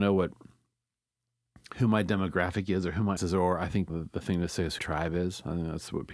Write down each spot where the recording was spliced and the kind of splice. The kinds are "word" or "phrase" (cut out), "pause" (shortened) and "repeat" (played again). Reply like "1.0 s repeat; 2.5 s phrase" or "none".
3.2 s word; 3.9 s word; 4.8 s word

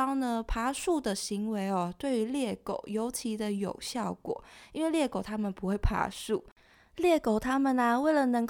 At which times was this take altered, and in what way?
none

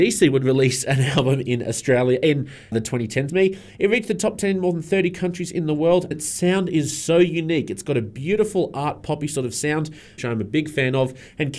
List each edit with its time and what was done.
2.7 s word; 3.3 s word; 6.1 s word; 10.2 s phrase

